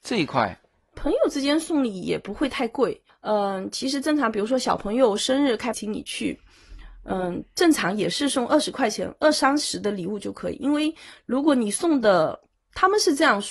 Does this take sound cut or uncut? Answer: cut